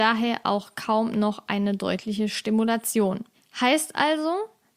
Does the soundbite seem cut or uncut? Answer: cut